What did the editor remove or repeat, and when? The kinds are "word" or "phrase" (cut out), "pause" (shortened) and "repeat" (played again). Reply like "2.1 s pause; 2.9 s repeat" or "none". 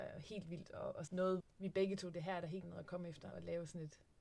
1.1 s word; 1.4 s word; 2.1 s word; 2.6 s word; 3.3 s word